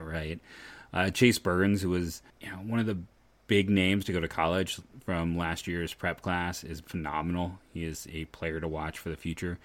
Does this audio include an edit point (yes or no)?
yes